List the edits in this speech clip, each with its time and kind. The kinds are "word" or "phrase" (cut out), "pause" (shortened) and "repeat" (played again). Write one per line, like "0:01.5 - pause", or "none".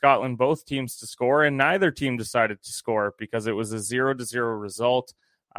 none